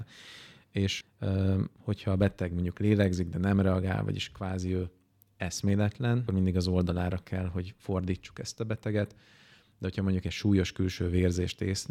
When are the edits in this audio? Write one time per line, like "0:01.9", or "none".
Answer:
0:01.0
0:06.3